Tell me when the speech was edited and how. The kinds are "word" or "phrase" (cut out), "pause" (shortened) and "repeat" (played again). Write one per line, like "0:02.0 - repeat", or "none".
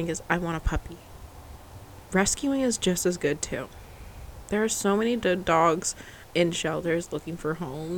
0:02.0 - pause
0:06.2 - pause